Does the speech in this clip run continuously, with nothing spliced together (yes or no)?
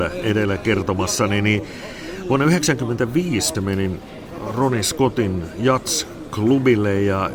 no